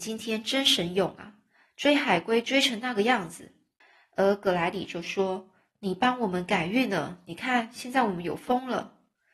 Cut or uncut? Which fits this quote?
cut